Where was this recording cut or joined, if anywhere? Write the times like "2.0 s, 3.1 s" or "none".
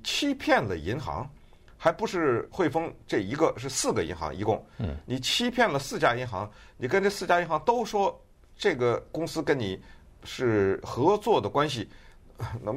none